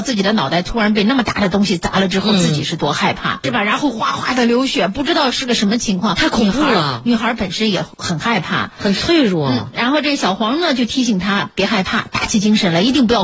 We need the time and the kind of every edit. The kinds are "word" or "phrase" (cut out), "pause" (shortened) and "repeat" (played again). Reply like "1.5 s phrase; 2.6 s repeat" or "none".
3.4 s word; 7.9 s pause